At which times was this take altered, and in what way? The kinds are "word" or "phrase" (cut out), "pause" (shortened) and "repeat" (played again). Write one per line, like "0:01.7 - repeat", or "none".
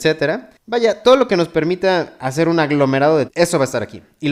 0:03.3 - word